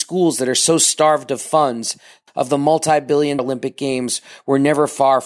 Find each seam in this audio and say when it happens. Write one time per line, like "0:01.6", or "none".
0:02.3
0:03.4